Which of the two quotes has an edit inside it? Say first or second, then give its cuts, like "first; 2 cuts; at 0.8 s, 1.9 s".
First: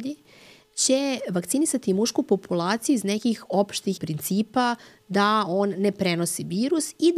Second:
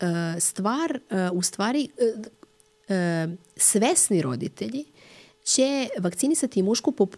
first; 1 cut; at 4.0 s